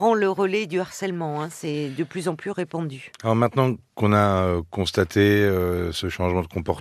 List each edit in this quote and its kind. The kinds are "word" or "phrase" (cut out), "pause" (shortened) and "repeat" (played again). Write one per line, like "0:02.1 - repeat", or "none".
none